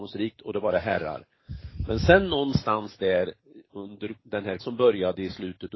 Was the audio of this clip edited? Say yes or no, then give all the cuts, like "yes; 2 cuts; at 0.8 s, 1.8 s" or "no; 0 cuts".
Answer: yes; 2 cuts; at 4.2 s, 4.6 s